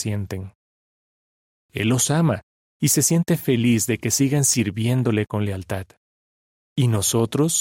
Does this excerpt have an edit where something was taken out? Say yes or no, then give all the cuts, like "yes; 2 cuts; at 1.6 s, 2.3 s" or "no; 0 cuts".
no; 0 cuts